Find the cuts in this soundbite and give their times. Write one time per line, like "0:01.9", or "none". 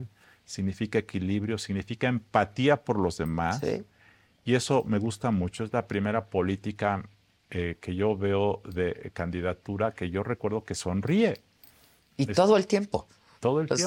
none

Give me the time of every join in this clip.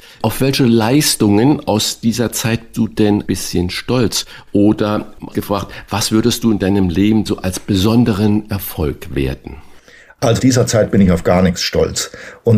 0:02.7
0:03.3
0:05.3
0:07.3
0:10.4

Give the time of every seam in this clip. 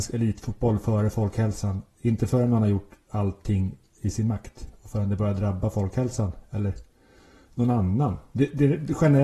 none

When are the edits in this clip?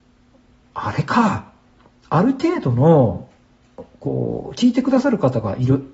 0:01.8

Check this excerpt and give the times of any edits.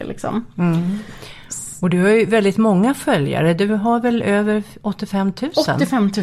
none

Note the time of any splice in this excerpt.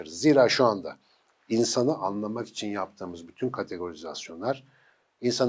none

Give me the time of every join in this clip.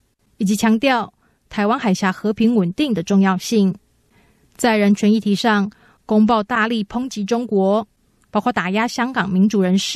none

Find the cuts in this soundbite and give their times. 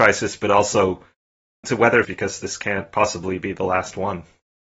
0:01.6
0:02.0

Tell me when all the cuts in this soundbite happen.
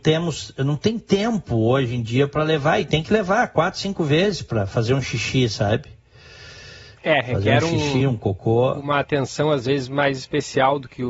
none

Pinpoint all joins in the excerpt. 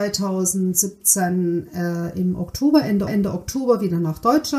0:03.1

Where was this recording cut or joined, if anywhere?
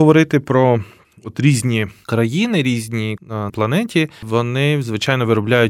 0:03.2
0:03.5

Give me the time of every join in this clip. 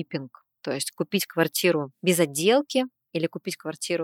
none

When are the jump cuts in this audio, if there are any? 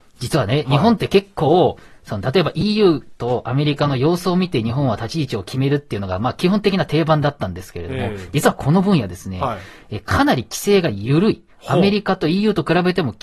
none

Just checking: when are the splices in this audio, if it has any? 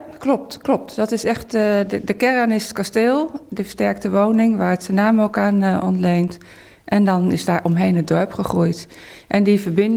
none

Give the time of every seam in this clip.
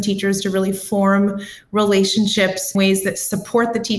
0:02.7

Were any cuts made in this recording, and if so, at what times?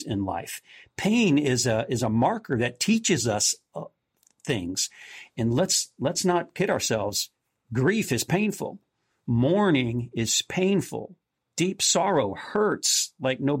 0:11.4

